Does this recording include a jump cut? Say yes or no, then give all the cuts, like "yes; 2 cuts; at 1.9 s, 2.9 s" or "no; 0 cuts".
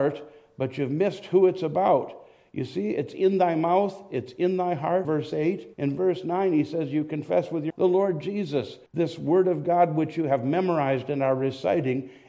yes; 4 cuts; at 5.0 s, 5.7 s, 7.7 s, 8.9 s